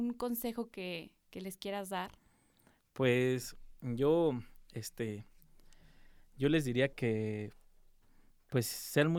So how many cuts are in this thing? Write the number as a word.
two